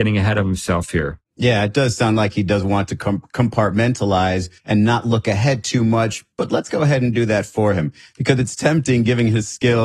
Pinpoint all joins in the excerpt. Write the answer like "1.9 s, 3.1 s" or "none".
1.3 s, 4.6 s, 6.3 s